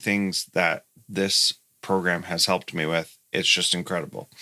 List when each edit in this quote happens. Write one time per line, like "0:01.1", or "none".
none